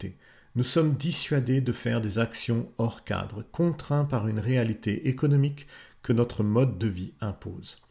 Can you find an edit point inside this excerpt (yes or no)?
no